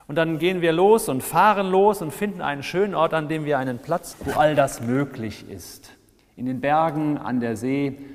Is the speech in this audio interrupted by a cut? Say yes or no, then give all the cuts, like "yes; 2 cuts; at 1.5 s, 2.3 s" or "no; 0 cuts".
yes; 1 cut; at 4.1 s